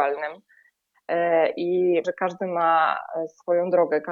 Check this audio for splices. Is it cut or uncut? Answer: cut